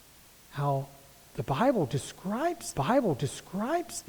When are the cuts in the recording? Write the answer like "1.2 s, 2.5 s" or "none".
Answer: 2.7 s

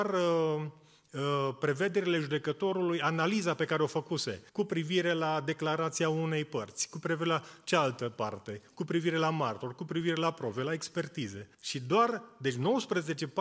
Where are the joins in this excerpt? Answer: 4.5 s, 11.5 s

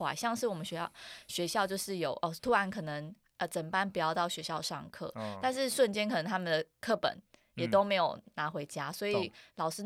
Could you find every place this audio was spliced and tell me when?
none

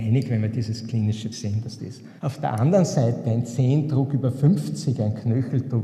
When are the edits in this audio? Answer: 1.3 s, 1.8 s, 2.2 s

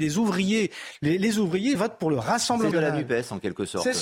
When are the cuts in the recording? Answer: 1.8 s, 2.7 s

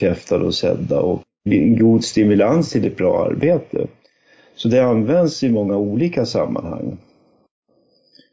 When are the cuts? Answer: none

